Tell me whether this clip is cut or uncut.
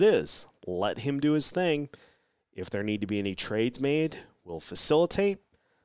uncut